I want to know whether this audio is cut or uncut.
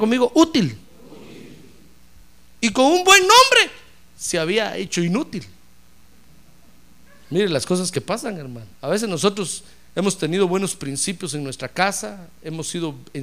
cut